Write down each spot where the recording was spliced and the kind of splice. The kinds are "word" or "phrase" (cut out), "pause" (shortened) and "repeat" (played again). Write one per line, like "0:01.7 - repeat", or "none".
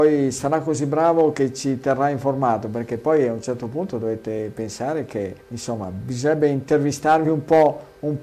0:05.4 - pause